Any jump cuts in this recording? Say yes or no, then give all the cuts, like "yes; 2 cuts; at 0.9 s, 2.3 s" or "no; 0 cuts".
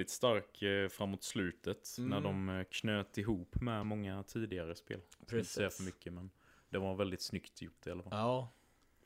no; 0 cuts